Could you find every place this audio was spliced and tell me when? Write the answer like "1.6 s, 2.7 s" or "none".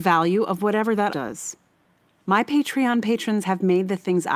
1.1 s, 1.7 s